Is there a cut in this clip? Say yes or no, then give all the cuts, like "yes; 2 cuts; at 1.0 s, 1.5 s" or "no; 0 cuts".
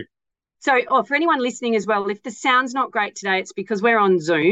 no; 0 cuts